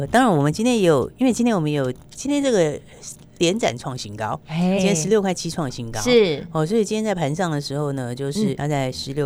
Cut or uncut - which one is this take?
cut